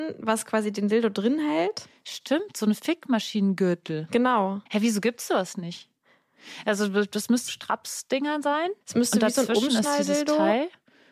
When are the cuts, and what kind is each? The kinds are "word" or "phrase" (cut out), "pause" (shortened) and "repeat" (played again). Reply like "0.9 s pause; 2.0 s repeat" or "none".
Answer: 4.7 s pause; 7.5 s word; 8.8 s pause